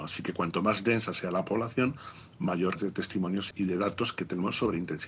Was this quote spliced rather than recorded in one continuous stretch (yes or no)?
yes